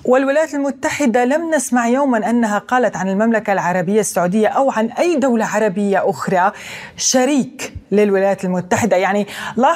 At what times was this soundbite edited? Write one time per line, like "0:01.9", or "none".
none